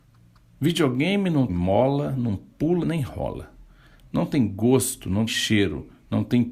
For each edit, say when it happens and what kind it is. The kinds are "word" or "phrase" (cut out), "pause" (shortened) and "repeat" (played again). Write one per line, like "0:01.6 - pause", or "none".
0:01.5 - word
0:02.8 - word
0:05.3 - word